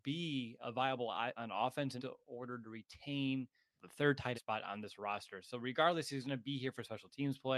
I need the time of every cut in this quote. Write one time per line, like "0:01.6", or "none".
0:01.4
0:02.0
0:03.8
0:04.3